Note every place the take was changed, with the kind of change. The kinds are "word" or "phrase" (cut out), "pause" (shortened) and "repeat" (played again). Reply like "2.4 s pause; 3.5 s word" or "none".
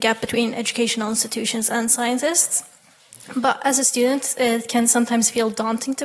none